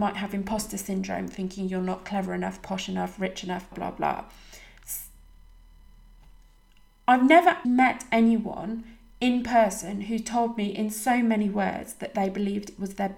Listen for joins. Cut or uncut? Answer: cut